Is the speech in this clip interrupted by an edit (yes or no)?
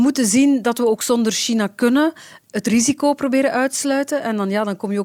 no